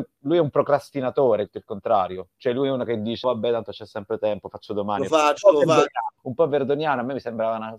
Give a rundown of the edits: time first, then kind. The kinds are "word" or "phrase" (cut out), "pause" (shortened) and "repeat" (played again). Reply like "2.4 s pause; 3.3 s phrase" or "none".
1.5 s word; 3.2 s word; 5.1 s word; 6.2 s pause